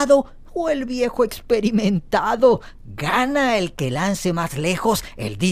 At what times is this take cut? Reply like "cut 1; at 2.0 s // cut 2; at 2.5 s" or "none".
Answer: cut 1; at 2.8 s